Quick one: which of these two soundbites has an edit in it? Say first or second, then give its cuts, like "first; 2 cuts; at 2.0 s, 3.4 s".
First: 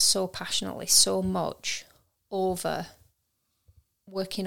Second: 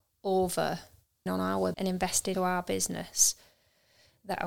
second; 3 cuts; at 1.3 s, 1.7 s, 2.3 s